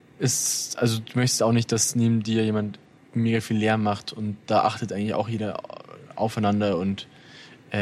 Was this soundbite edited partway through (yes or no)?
no